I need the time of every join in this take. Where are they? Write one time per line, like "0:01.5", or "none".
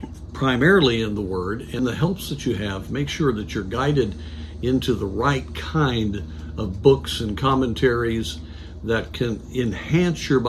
0:01.8